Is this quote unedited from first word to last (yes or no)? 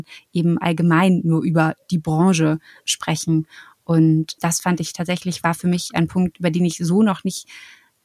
no